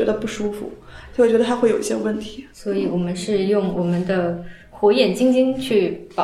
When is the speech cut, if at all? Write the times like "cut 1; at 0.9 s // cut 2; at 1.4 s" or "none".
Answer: cut 1; at 2.5 s